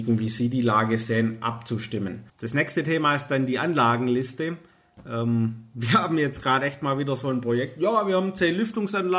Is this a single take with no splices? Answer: no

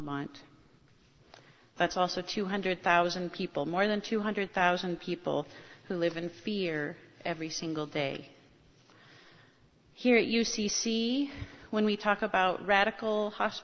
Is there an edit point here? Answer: no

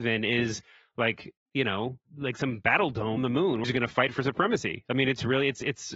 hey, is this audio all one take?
no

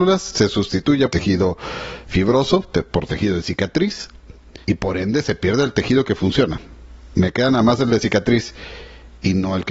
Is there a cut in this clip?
yes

